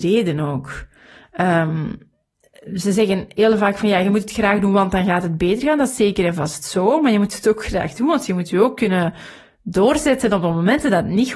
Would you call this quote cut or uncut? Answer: uncut